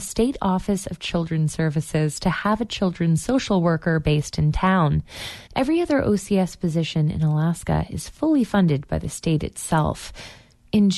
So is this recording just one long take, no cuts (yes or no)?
no